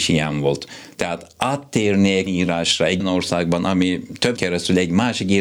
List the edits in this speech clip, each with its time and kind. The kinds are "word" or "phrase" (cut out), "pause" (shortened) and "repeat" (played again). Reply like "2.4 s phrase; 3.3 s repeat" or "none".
2.3 s word; 3.0 s word; 4.4 s word